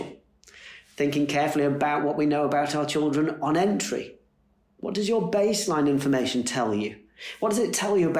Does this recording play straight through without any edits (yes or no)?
yes